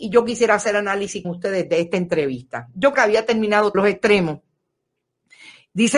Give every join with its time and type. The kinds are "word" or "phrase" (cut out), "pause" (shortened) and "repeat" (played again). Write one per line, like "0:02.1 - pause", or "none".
0:01.2 - word
0:02.9 - word
0:03.7 - word

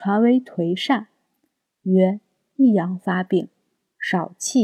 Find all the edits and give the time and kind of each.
none

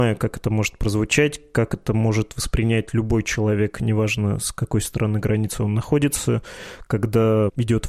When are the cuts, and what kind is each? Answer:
none

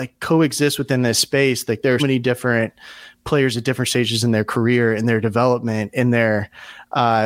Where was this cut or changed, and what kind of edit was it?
0:02.0 - word

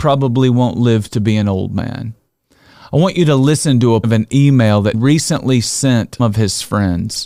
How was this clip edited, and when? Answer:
0:04.0 - word
0:04.9 - word
0:06.2 - word

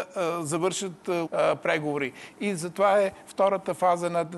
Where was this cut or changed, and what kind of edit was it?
0:01.3 - phrase

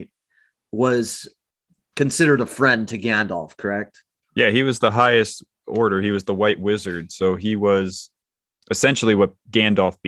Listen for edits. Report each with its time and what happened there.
none

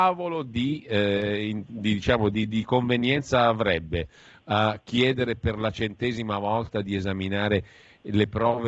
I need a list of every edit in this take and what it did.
none

